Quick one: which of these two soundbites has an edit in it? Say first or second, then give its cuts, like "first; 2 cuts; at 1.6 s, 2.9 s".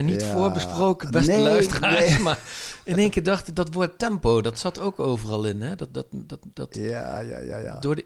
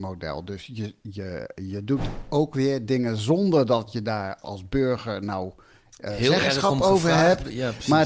second; 1 cut; at 4.4 s